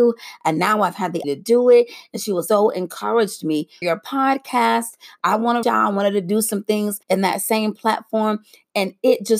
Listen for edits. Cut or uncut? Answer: cut